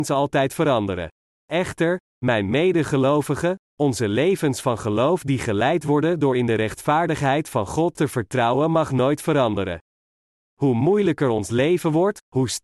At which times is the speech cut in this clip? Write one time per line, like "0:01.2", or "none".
0:01.2